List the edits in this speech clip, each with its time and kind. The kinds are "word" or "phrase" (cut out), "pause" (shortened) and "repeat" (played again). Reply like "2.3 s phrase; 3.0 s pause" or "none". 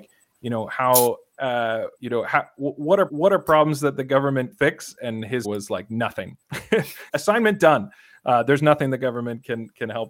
2.0 s pause; 3.1 s repeat; 4.5 s word; 5.4 s word; 7.1 s word